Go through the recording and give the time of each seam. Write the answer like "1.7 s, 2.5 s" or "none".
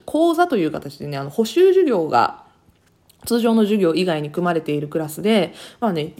none